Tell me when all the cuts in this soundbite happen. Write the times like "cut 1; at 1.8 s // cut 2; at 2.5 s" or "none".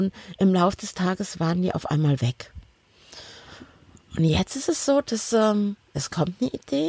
none